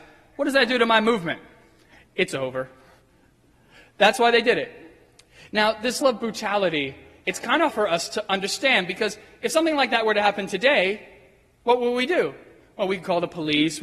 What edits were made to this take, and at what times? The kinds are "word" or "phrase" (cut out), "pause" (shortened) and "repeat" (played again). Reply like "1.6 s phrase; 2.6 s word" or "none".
6.0 s word; 7.7 s word